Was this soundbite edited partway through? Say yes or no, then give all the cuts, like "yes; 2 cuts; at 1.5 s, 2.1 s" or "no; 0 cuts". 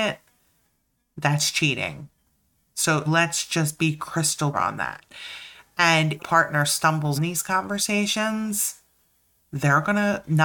yes; 4 cuts; at 3.1 s, 4.5 s, 6.2 s, 7.2 s